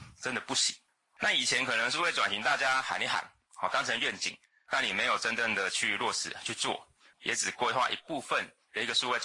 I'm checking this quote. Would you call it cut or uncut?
uncut